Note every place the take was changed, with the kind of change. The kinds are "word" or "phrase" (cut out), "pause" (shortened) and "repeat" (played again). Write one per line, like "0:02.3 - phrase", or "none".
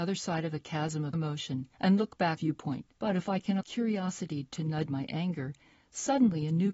0:01.1 - word
0:01.7 - pause
0:02.4 - phrase
0:02.9 - pause
0:03.6 - word
0:04.9 - word